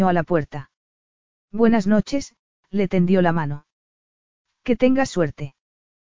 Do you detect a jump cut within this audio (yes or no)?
no